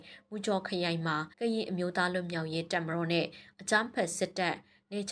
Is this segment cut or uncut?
cut